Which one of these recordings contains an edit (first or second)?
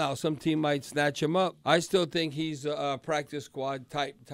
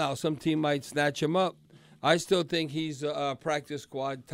first